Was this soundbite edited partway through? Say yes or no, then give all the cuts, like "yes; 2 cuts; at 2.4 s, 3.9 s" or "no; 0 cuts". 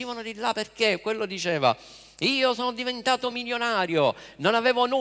no; 0 cuts